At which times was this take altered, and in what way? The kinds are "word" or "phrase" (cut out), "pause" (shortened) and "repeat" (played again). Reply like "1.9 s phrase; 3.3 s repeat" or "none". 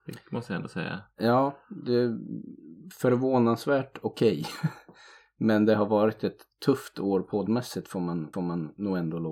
8.3 s repeat